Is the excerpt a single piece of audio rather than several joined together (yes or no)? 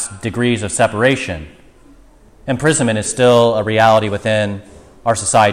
yes